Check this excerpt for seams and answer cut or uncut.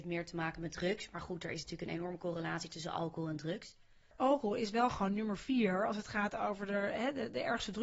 uncut